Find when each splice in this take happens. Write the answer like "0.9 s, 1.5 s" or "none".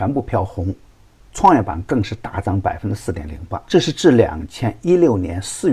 3.6 s